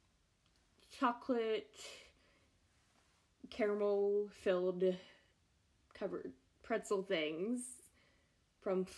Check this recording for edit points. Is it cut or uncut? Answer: uncut